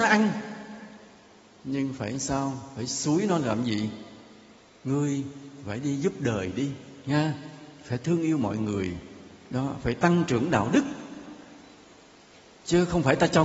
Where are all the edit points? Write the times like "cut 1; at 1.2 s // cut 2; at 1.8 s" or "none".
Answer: none